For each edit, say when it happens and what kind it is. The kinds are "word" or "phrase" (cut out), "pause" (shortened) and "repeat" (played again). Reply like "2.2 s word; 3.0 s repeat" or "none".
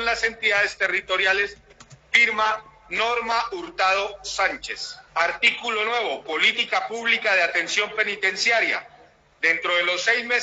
5.1 s pause